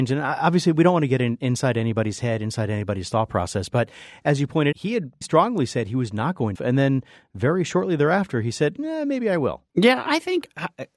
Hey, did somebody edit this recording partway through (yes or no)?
yes